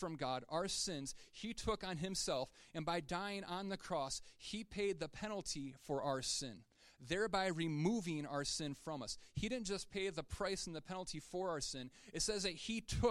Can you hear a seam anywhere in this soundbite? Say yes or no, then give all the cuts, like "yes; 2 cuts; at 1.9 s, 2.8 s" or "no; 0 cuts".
no; 0 cuts